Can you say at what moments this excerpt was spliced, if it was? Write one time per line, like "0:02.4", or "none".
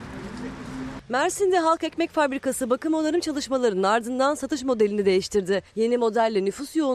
0:05.7

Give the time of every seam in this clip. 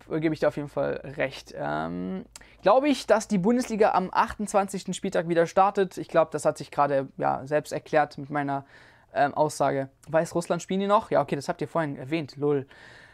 0:10.0

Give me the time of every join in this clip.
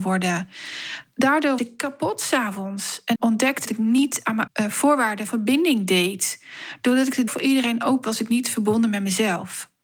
0:01.6
0:03.1
0:03.6
0:04.5
0:05.3
0:07.3
0:08.0

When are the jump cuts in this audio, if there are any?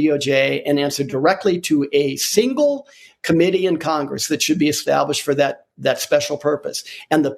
none

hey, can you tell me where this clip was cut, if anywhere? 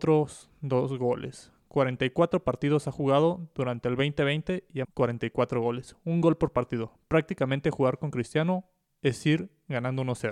0:04.8

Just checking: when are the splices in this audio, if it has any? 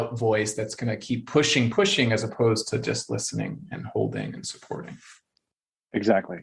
0:01.7

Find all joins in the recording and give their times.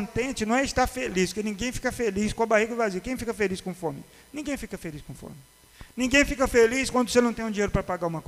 none

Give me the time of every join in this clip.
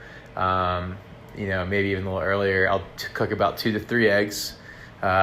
none

